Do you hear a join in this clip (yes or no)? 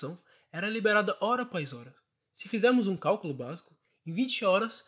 no